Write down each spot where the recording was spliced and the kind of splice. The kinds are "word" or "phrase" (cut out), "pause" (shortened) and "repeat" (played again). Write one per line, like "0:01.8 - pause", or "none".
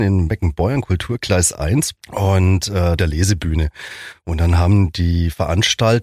0:02.0 - pause
0:03.0 - phrase